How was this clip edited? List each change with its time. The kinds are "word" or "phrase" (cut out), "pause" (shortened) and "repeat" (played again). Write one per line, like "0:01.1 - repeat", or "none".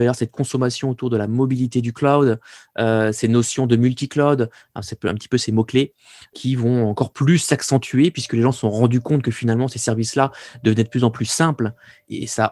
none